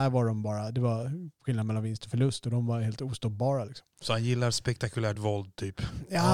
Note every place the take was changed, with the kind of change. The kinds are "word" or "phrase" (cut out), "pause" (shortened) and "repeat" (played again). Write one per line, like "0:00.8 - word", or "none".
none